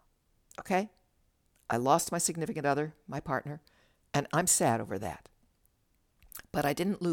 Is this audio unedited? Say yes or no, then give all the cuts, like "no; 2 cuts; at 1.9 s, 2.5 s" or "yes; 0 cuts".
yes; 0 cuts